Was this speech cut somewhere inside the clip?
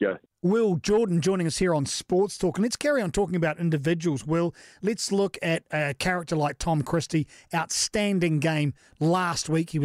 no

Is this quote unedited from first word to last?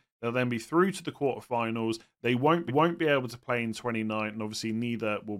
no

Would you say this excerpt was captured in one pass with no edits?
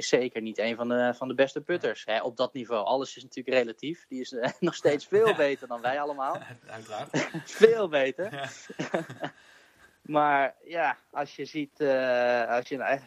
yes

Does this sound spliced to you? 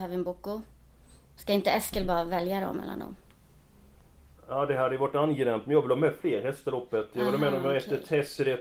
no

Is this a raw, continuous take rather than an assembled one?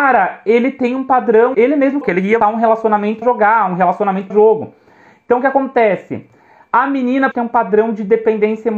no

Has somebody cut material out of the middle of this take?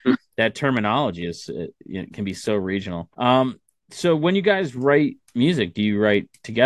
yes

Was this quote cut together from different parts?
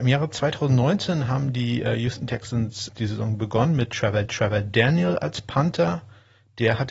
yes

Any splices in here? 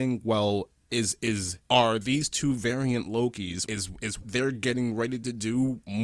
yes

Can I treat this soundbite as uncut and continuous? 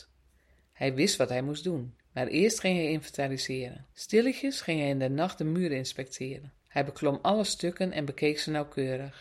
no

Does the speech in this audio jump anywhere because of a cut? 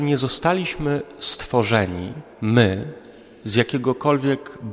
no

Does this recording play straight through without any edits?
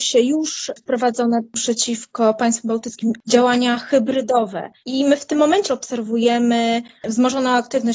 no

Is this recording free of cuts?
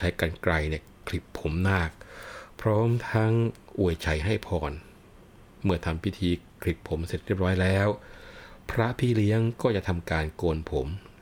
yes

